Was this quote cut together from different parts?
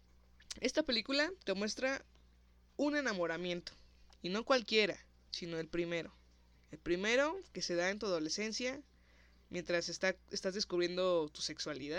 yes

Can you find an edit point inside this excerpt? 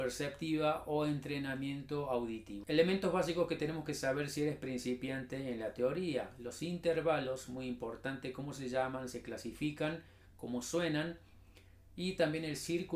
no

